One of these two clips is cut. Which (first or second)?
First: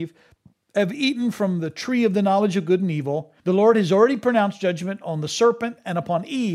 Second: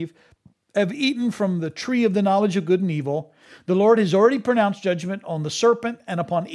first